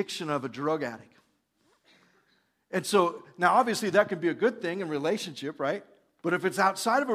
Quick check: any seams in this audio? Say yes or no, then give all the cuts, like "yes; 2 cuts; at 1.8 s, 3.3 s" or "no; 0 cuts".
no; 0 cuts